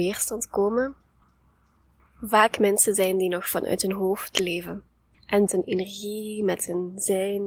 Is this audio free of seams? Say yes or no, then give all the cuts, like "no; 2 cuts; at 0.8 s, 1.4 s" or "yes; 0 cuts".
no; 1 cut; at 5.5 s